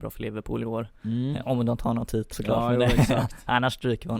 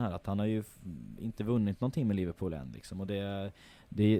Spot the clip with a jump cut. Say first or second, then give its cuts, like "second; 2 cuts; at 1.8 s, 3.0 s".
first; 1 cut; at 2.3 s